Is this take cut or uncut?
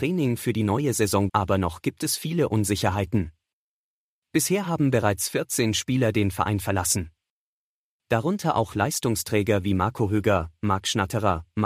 cut